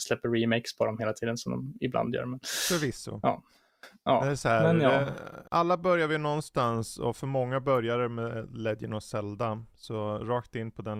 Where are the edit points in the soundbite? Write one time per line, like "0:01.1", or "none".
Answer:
0:05.5